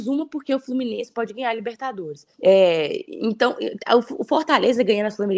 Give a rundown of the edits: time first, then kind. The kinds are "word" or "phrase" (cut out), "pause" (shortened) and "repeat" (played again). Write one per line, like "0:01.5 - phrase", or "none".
0:02.3 - pause

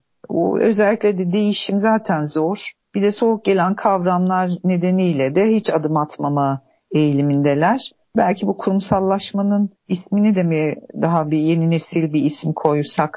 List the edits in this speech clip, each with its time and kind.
none

